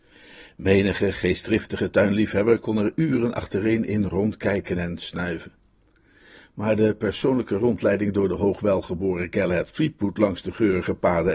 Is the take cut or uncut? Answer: uncut